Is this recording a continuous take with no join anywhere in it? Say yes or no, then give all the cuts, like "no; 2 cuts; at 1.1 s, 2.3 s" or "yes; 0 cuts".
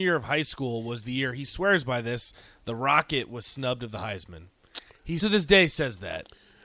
no; 1 cut; at 5.2 s